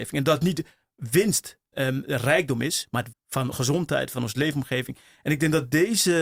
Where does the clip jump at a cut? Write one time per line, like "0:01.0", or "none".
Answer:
0:01.7
0:03.1
0:03.5